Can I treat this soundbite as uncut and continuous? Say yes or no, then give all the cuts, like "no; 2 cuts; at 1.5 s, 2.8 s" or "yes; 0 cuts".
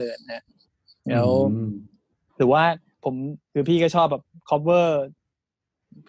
no; 1 cut; at 3.4 s